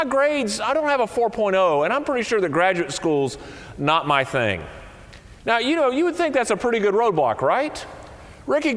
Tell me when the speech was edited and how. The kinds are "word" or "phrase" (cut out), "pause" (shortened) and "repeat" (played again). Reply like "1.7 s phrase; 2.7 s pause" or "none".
5.4 s pause